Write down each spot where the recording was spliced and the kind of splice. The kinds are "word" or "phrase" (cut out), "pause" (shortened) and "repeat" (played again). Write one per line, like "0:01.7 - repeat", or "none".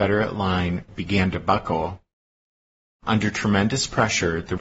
none